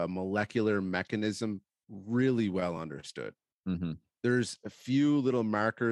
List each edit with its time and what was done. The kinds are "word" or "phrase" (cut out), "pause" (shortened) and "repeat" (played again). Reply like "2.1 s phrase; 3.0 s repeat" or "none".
none